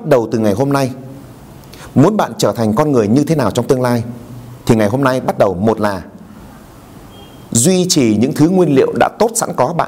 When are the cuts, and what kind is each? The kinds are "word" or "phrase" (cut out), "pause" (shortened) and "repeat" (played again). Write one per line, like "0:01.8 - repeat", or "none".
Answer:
none

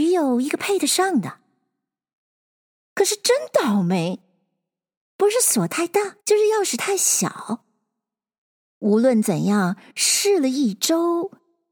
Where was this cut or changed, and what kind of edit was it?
0:06.2 - pause

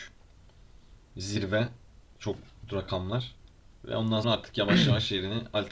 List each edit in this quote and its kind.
0:02.7 - word
0:04.2 - word

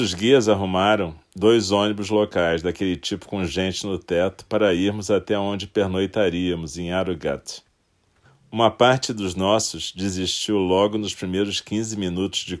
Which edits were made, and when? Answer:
0:08.3 - pause

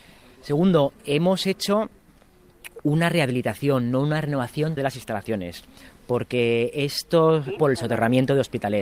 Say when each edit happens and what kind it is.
0:01.0 - pause
0:04.8 - word
0:07.6 - phrase

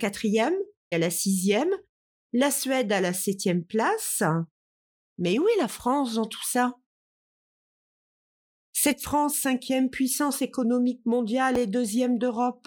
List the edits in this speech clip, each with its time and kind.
0:00.9 - phrase

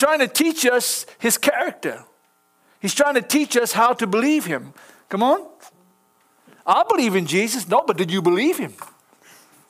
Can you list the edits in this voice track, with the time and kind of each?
none

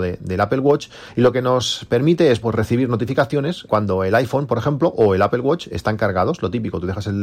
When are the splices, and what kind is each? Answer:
0:02.4 - word
0:03.7 - word

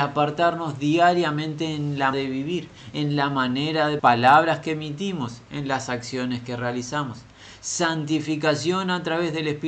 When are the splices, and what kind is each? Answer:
0:02.1 - word
0:04.0 - phrase

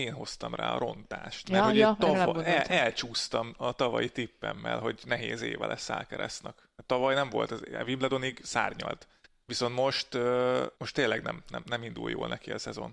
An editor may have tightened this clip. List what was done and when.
0:09.2 - pause
0:10.8 - pause

